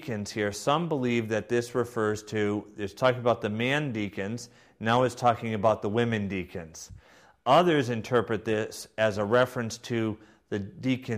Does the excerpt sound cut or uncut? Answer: uncut